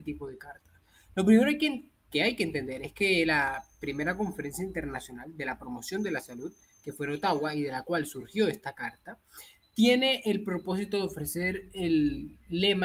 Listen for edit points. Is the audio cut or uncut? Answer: uncut